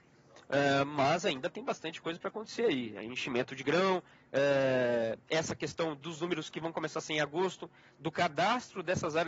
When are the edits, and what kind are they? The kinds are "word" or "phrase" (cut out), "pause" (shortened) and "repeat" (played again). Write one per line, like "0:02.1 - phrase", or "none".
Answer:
0:04.1 - pause

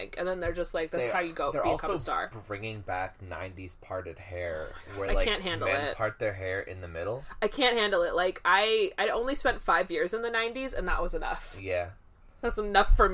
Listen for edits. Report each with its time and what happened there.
none

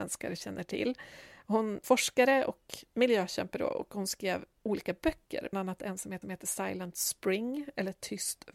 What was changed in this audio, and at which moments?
0:01.8 - word
0:05.5 - word
0:06.2 - repeat

